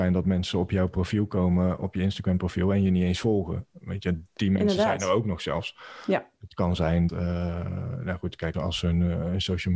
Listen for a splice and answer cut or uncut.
cut